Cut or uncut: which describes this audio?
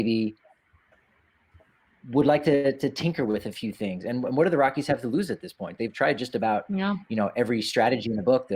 uncut